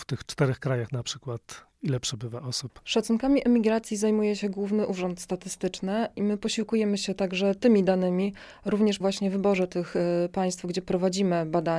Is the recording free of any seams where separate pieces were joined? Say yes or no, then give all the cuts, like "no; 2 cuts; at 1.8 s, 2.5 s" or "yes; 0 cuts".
no; 1 cut; at 9.0 s